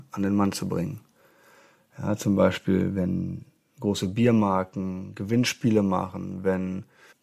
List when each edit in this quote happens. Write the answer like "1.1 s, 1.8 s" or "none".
none